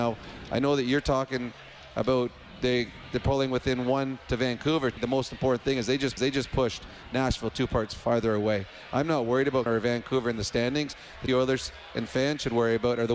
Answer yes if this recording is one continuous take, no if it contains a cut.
no